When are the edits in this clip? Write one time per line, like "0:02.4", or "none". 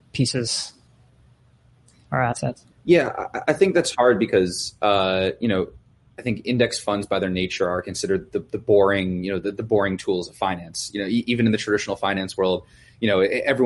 0:02.7